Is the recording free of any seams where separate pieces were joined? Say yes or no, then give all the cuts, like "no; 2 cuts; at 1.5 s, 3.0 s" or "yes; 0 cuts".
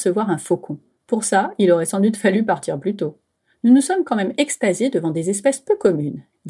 yes; 0 cuts